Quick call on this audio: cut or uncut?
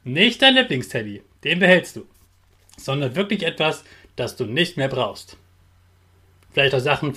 uncut